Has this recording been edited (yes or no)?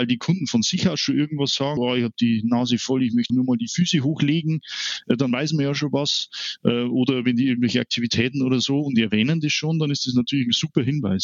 yes